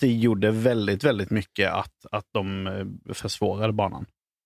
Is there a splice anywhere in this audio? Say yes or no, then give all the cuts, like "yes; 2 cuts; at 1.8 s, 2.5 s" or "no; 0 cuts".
no; 0 cuts